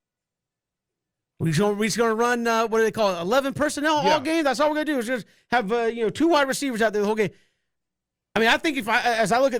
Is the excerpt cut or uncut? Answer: uncut